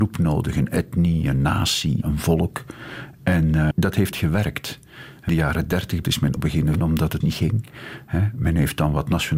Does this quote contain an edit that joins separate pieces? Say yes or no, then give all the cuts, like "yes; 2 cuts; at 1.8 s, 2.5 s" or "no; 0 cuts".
yes; 8 cuts; at 2.0 s, 3.7 s, 4.1 s, 5.3 s, 6.0 s, 6.4 s, 6.8 s, 7.2 s